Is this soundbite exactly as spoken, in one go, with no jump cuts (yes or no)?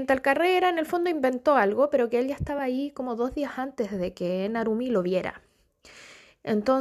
yes